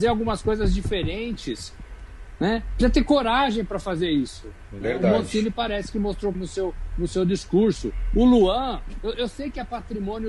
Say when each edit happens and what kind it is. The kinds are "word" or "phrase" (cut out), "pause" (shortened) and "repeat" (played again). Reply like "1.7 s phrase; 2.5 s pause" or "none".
6.3 s word